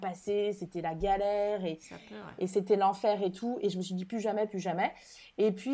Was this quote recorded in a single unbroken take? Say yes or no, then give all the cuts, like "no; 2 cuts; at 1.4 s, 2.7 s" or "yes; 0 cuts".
yes; 0 cuts